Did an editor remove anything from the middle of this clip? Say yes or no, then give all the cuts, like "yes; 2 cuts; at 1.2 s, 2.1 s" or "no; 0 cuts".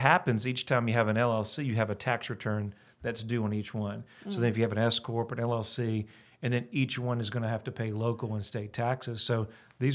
no; 0 cuts